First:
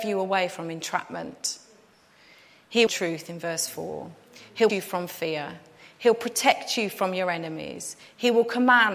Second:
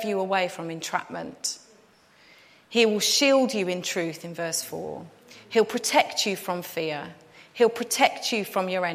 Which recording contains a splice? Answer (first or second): first